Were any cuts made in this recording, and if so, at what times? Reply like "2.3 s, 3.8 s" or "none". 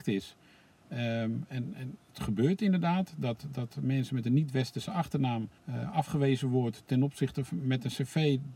5.6 s